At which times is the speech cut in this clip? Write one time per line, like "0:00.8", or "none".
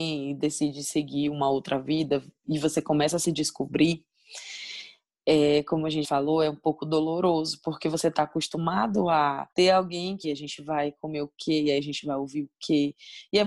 0:06.0
0:09.5
0:10.2